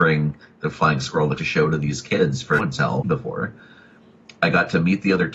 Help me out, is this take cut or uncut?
cut